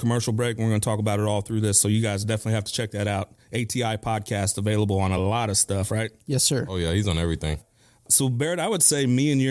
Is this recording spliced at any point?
no; 0 cuts

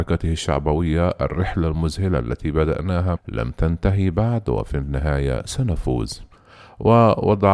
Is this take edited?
yes; 1 cut; at 3.2 s

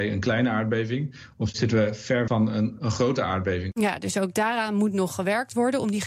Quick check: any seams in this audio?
yes; 1 cut; at 2.3 s

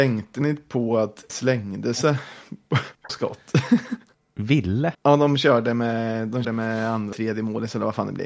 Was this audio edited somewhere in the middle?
yes; 5 cuts; at 1.3 s, 3.1 s, 4.9 s, 6.4 s, 7.1 s

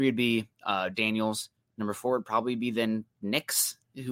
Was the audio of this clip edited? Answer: no; 0 cuts

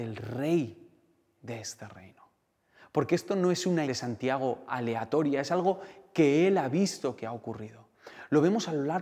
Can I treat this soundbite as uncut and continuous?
no; 1 cut; at 3.8 s

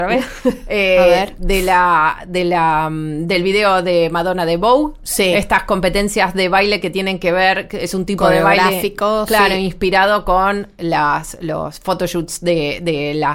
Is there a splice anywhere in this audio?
no; 0 cuts

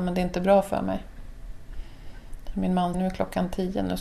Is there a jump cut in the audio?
yes; 1 cut; at 2.9 s

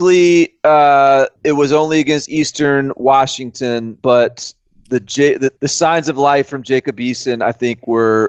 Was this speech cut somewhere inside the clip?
yes; 3 cuts; at 1.4 s, 4.0 s, 5.6 s

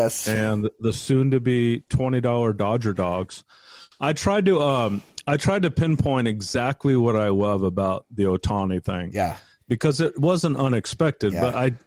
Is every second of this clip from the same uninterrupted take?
no; 1 cut; at 9.6 s

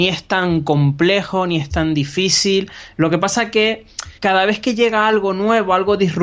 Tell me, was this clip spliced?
yes; 1 cut; at 4.1 s

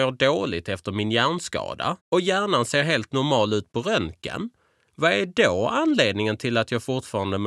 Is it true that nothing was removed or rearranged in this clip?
no; 1 cut; at 2.0 s

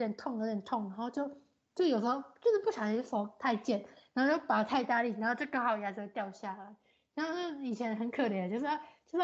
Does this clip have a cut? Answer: no; 0 cuts

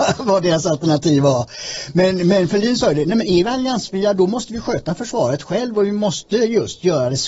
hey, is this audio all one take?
yes; 0 cuts

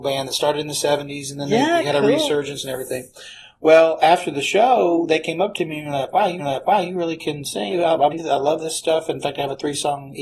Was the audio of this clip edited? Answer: yes; 3 cuts; at 6.4 s, 7.7 s, 8.1 s

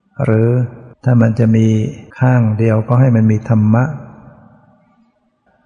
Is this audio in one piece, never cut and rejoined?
no; 2 cuts; at 0.9 s, 2.1 s

